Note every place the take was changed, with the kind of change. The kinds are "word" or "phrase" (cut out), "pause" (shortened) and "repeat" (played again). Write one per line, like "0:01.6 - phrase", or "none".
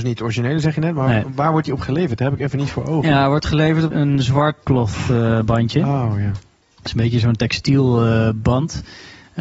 0:03.9 - word
0:04.6 - word